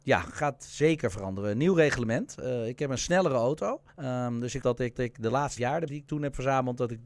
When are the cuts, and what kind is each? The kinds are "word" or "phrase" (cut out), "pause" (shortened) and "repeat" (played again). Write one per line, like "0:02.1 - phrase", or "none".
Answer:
0:03.9 - pause
0:04.6 - word
0:05.0 - repeat
0:05.6 - word
0:05.9 - word